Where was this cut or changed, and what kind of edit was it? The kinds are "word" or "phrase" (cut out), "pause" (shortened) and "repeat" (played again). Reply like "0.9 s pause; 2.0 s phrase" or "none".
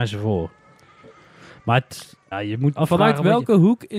2.3 s word; 2.8 s word